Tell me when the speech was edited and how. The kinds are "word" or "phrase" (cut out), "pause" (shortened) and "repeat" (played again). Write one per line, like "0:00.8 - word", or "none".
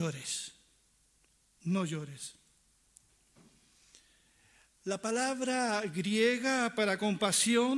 none